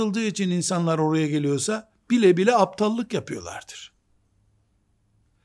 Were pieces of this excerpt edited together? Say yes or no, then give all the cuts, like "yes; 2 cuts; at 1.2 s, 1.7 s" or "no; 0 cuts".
no; 0 cuts